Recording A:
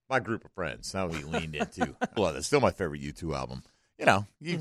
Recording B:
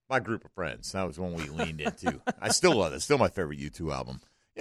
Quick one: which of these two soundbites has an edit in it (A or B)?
A